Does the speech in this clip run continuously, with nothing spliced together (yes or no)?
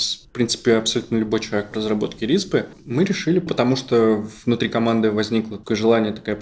no